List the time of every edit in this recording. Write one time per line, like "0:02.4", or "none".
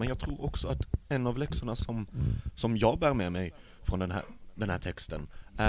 none